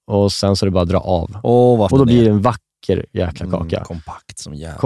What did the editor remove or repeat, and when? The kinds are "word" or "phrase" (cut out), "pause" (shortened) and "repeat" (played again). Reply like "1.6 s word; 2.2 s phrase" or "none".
1.9 s word